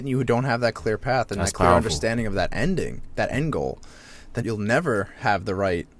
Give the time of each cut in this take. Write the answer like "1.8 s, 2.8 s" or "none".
4.4 s

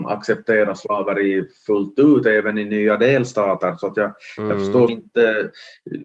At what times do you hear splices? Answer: 4.9 s

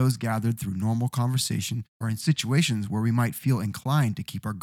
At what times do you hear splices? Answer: 1.9 s

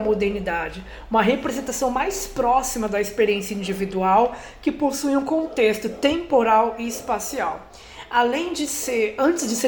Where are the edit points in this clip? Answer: none

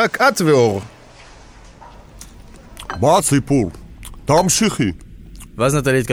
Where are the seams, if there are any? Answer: 3.2 s

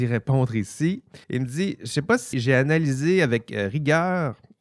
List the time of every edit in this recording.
1.2 s, 2.3 s

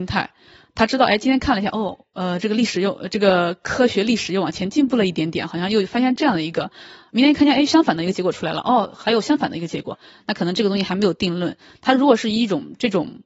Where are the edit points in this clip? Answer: none

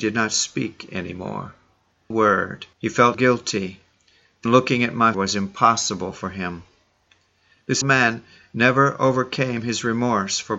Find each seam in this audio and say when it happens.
2.1 s, 2.7 s, 3.1 s, 4.5 s, 5.1 s, 7.8 s

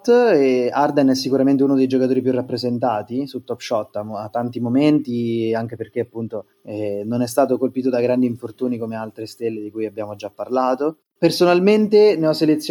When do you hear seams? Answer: 6.5 s

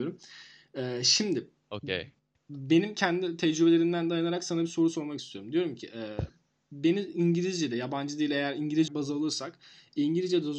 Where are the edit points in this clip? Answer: 8.9 s

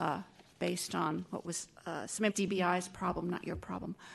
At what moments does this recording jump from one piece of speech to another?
2.3 s

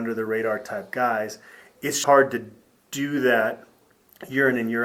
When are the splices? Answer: 2.0 s

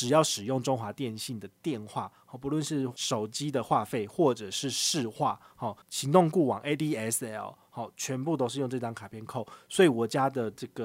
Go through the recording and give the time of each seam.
5.8 s

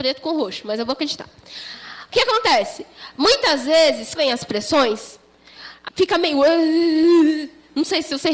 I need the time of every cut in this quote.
4.1 s, 5.9 s

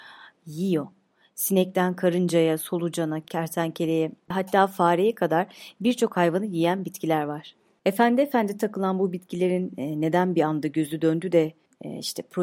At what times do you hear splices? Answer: none

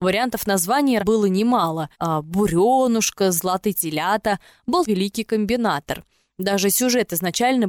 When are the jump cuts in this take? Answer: 1.0 s, 1.9 s, 3.7 s, 4.9 s

